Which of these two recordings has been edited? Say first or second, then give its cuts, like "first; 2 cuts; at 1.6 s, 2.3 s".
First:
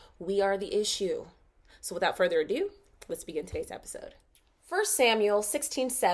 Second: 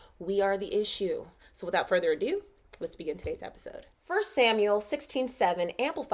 second; 2 cuts; at 1.4 s, 3.9 s